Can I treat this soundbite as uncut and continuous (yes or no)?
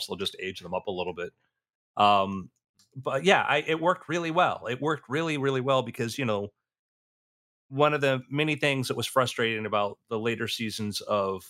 yes